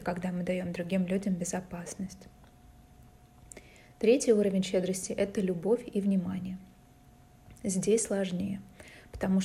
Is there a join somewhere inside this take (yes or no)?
no